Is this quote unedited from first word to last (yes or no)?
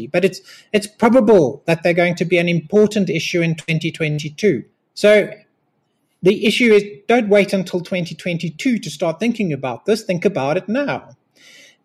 no